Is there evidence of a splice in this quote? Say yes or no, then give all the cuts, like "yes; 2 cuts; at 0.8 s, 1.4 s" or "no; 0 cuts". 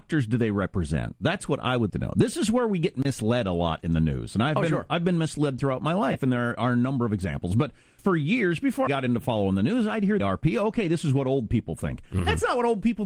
yes; 4 cuts; at 1.9 s, 8.0 s, 8.9 s, 10.2 s